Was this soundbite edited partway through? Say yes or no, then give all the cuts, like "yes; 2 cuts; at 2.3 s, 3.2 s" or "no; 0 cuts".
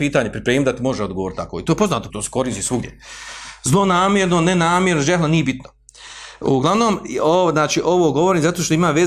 yes; 1 cut; at 2.1 s